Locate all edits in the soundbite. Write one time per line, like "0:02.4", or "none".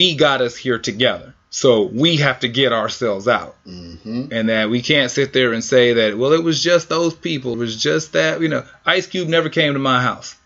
0:01.4
0:07.5